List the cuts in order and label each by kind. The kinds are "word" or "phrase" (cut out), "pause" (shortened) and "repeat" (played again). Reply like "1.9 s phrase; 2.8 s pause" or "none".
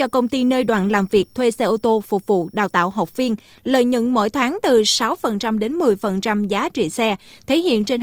none